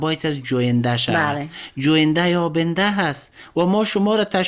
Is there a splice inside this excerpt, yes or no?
no